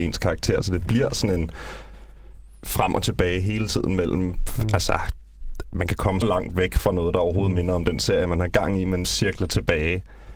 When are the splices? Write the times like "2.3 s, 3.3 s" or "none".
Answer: 6.2 s, 9.0 s

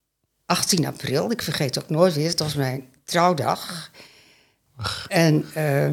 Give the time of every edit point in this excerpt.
none

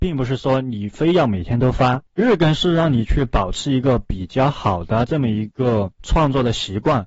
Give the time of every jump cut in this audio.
2.1 s, 6.0 s

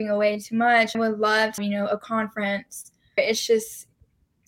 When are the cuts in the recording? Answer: 0.9 s, 1.6 s, 3.2 s

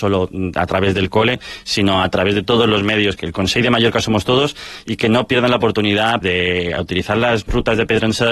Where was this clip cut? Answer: 3.2 s, 6.2 s

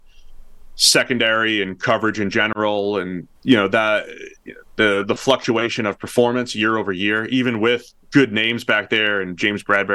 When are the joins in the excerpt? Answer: 3.4 s

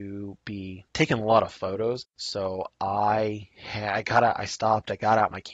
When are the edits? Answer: 2.1 s

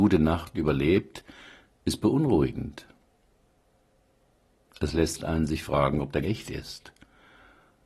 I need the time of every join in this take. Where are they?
6.2 s

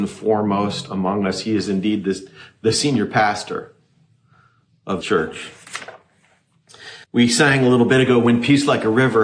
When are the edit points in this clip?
5.0 s, 7.0 s

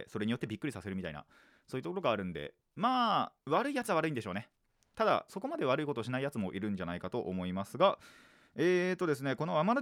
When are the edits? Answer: 3.4 s, 5.3 s

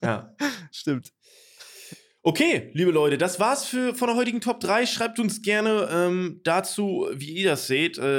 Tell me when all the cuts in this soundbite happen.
none

